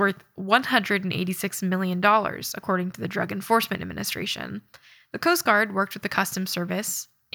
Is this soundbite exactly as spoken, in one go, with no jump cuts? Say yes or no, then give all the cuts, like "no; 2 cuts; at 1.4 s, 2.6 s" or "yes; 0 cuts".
yes; 0 cuts